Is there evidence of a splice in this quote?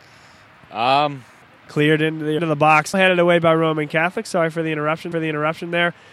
yes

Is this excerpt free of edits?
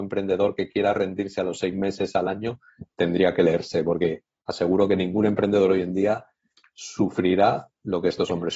yes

